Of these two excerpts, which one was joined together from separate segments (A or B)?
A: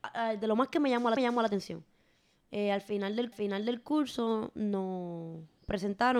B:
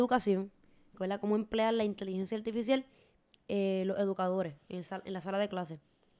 A